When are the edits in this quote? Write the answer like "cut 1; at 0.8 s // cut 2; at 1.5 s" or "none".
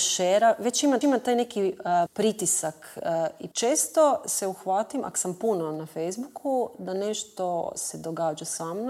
cut 1; at 1.0 s // cut 2; at 2.1 s // cut 3; at 3.5 s